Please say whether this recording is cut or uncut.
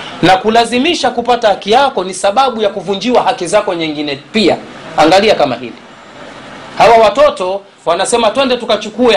uncut